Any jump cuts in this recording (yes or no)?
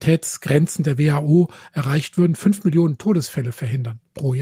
no